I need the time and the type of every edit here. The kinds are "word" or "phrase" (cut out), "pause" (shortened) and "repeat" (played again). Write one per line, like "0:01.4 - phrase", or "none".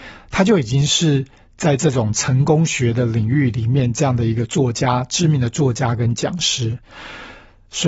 none